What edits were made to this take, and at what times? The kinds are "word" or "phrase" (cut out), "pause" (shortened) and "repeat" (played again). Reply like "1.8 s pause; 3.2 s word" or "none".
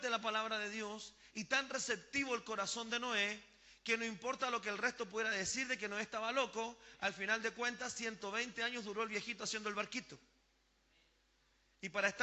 none